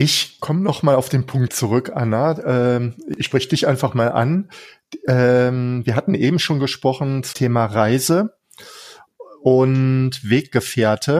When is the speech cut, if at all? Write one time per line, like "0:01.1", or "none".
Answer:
0:01.5
0:07.3